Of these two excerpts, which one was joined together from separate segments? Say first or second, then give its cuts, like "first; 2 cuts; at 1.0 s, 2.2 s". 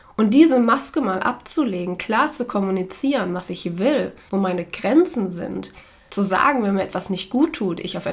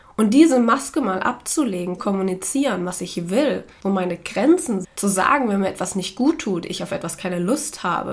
second; 2 cuts; at 2.0 s, 4.8 s